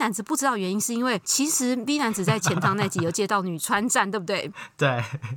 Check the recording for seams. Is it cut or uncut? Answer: uncut